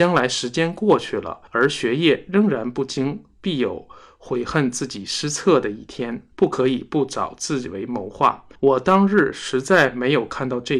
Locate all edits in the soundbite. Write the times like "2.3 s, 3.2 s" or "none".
1.5 s, 6.3 s, 8.6 s